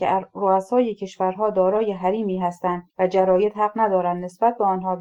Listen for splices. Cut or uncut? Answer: cut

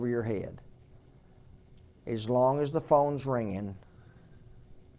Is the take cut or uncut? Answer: uncut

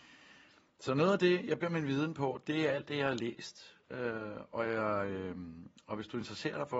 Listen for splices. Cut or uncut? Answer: cut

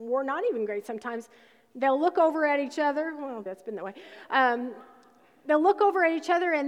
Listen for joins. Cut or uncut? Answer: cut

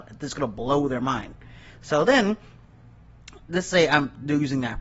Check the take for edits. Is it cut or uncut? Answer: uncut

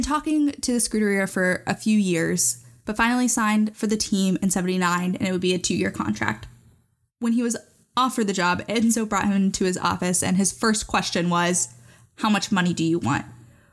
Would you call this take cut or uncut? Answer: uncut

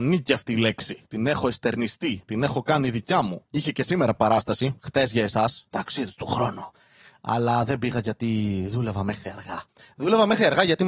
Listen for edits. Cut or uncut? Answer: uncut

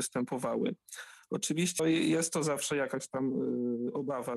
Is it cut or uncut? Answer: cut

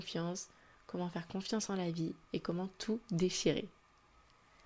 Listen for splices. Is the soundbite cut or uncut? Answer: uncut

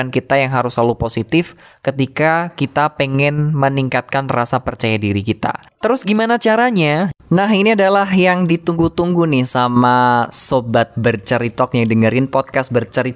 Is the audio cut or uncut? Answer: uncut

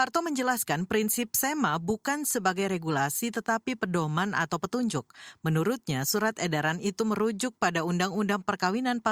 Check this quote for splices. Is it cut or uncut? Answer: uncut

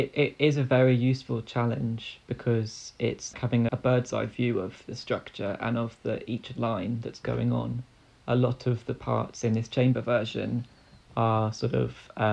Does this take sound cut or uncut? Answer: cut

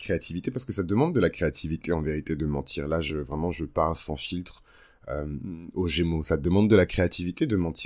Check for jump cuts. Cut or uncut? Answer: uncut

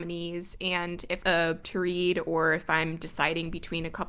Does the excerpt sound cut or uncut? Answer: cut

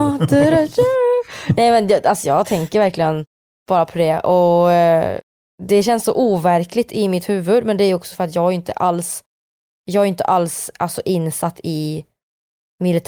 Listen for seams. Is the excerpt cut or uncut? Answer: uncut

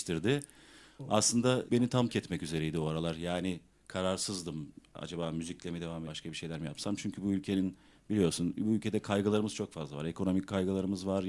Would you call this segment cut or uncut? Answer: cut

